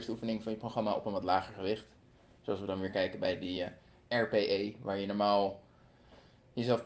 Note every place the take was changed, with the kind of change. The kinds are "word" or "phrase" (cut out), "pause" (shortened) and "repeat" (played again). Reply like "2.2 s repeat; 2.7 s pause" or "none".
none